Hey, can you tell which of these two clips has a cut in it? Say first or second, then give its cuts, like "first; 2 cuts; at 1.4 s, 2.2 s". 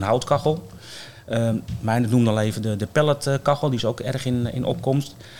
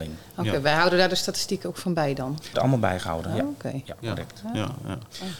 second; 1 cut; at 2.5 s